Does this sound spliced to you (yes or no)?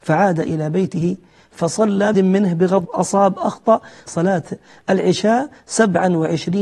yes